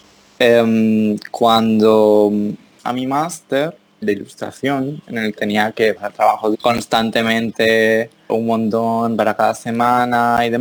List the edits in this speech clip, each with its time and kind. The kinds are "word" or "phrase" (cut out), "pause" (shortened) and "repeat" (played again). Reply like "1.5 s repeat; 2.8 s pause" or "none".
4.0 s word; 5.4 s word; 6.0 s phrase; 6.5 s word; 8.3 s word